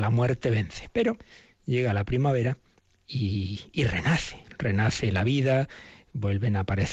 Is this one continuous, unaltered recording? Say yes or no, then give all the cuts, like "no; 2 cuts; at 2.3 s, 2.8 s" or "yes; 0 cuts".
yes; 0 cuts